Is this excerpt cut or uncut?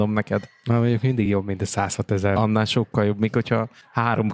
uncut